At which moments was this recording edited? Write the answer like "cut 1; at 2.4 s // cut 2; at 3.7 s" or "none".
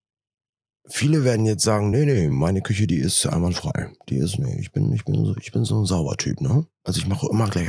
none